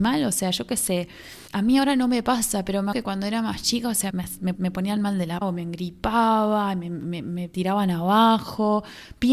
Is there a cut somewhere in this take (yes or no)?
yes